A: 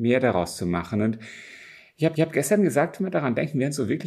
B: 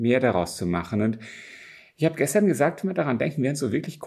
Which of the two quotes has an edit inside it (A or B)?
A